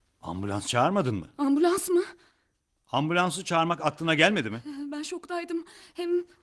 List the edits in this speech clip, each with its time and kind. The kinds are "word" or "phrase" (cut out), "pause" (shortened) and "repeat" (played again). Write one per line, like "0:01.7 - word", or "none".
none